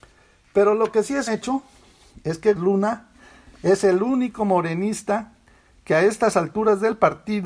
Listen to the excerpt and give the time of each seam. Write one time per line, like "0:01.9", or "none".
0:01.3
0:02.6